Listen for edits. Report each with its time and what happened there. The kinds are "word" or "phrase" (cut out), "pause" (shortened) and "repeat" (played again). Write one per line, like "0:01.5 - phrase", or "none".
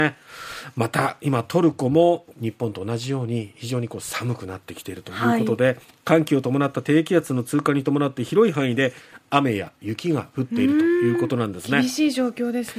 0:02.3 - pause
0:05.8 - pause